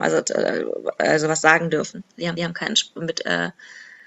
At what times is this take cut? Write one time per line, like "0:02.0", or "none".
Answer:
0:02.4